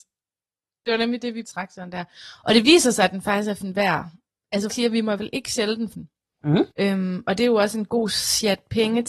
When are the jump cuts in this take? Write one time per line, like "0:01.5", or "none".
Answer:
0:01.4
0:03.6
0:04.7
0:05.2
0:05.9
0:06.7